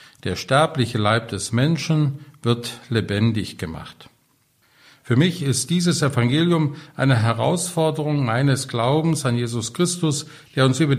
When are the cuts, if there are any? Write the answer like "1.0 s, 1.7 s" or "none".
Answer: none